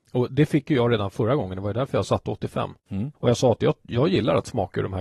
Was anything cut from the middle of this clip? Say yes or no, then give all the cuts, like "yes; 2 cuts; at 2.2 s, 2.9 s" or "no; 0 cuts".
no; 0 cuts